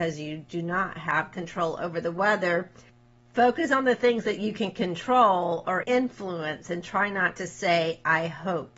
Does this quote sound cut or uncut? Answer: cut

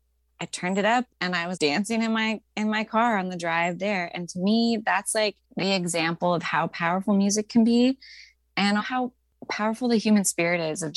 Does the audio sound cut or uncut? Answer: cut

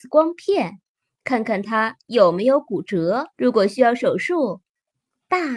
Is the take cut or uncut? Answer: cut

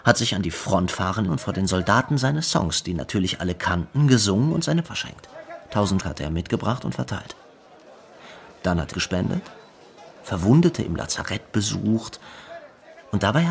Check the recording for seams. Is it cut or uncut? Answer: cut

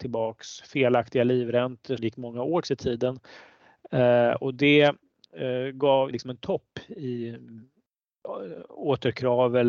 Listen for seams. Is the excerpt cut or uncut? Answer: cut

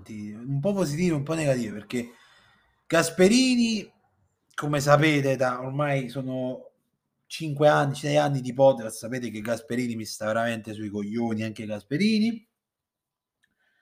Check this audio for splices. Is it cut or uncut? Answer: uncut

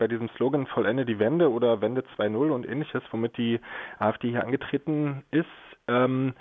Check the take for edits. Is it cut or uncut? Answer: uncut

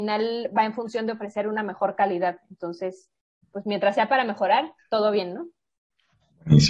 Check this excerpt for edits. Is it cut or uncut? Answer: uncut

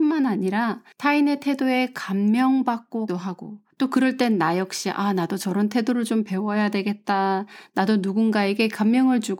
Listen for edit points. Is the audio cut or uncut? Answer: cut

